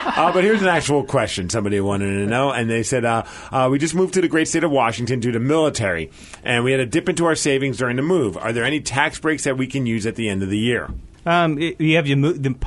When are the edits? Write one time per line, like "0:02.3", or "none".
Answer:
0:11.1

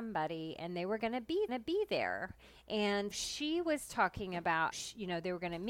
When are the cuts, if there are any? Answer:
0:01.5
0:03.1
0:04.7

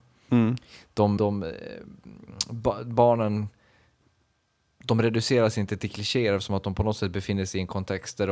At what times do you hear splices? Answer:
0:01.2

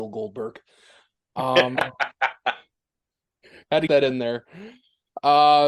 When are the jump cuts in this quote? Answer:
0:03.9

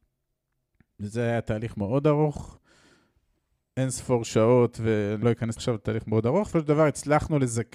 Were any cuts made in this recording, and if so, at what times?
0:05.2
0:05.6
0:06.5

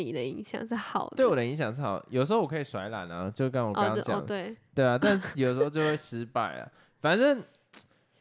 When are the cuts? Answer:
none

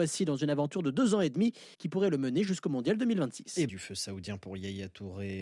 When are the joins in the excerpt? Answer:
0:01.7
0:03.7

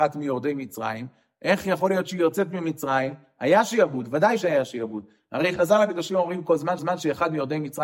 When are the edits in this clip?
0:06.8

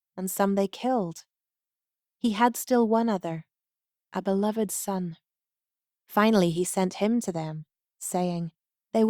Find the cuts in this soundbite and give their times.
none

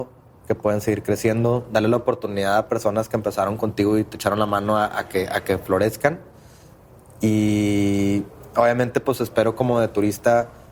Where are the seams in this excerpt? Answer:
none

